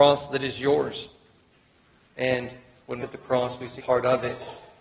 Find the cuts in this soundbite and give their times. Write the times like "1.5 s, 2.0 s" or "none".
3.0 s, 3.8 s